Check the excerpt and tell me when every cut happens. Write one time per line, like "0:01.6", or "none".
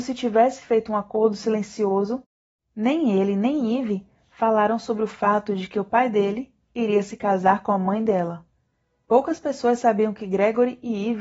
none

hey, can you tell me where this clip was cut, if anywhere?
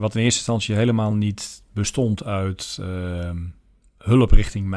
none

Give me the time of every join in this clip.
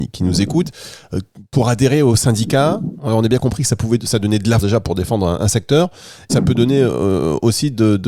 0:04.6
0:06.3

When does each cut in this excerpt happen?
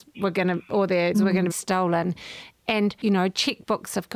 0:01.1
0:01.5

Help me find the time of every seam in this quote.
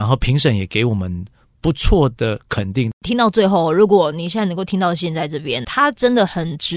0:05.6

